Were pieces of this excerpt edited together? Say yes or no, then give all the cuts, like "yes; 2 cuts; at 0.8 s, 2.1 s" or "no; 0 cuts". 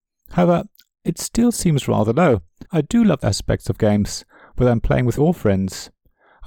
yes; 3 cuts; at 2.7 s, 3.2 s, 5.2 s